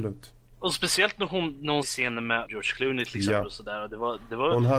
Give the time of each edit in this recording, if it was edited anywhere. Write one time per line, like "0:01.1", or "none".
0:01.8
0:02.5

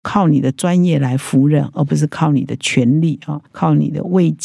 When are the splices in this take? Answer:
0:03.4

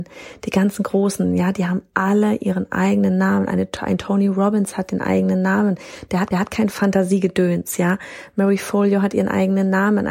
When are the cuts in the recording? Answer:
0:06.3

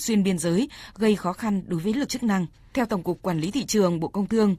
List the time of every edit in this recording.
0:02.1
0:02.5

